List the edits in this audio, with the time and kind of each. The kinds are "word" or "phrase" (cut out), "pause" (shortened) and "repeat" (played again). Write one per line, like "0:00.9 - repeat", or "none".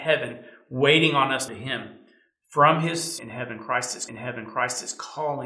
0:01.5 - phrase
0:03.2 - word
0:04.1 - repeat